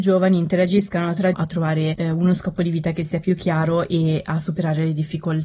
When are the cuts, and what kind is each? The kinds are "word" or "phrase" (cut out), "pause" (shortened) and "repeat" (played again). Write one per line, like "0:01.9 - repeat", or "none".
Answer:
0:01.3 - phrase